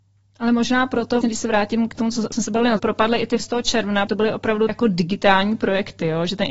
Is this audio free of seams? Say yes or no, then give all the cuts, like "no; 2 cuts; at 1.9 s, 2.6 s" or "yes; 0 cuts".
no; 7 cuts; at 1.2 s, 1.9 s, 2.3 s, 2.8 s, 3.4 s, 4.1 s, 4.7 s